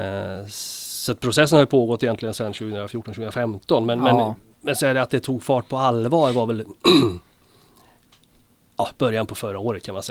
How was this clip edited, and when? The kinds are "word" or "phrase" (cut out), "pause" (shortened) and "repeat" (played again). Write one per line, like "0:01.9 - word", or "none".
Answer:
none